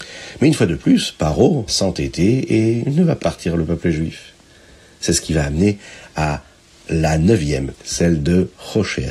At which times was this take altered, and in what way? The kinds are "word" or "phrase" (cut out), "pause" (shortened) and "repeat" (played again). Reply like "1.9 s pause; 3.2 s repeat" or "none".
1.7 s word; 3.2 s word; 7.7 s word